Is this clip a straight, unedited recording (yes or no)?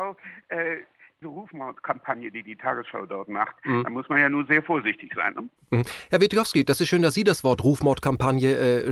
no